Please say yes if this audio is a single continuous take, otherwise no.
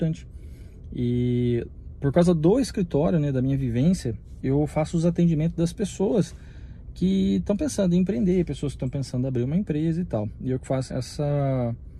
no